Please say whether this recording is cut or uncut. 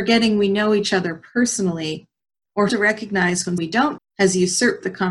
cut